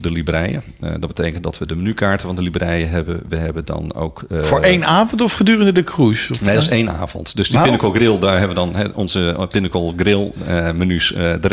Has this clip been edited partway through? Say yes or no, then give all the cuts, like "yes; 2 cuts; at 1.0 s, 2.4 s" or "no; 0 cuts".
no; 0 cuts